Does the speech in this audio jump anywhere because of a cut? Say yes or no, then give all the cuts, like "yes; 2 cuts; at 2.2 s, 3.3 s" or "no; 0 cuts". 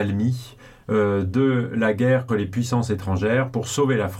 yes; 1 cut; at 2.3 s